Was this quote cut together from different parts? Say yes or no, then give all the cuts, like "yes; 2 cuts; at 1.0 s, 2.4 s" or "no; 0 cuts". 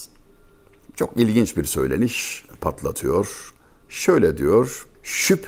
yes; 1 cut; at 2.5 s